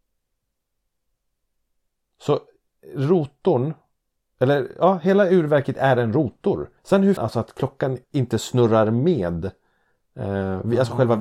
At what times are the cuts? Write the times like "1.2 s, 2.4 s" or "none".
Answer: 6.8 s, 7.2 s, 8.0 s